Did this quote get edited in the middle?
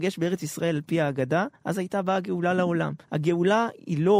yes; 2 cuts; at 1.6 s, 3.0 s

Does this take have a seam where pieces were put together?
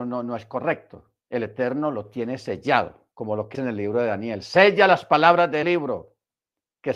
yes; 4 cuts; at 1.2 s, 3.1 s, 3.5 s, 5.6 s

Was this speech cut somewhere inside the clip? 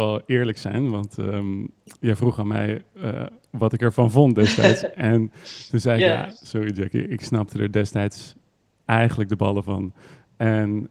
no; 0 cuts

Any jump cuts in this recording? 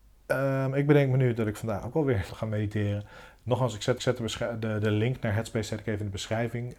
yes; 2 cuts; at 2.3 s, 4.0 s

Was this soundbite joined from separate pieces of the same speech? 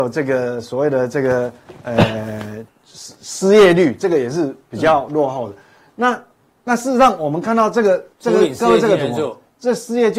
yes; 3 cuts; at 2.7 s, 6.3 s, 8.1 s

